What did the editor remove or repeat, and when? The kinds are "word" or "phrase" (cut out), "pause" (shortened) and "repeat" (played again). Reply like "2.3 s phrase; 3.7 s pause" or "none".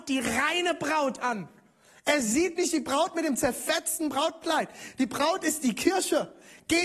none